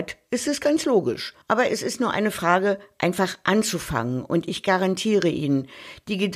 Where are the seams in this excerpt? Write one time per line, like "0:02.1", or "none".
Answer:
0:01.4